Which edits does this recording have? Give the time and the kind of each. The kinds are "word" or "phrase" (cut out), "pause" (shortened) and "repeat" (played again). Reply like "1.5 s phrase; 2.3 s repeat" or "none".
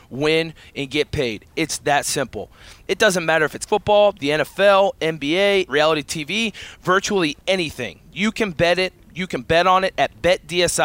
3.7 s word; 5.7 s phrase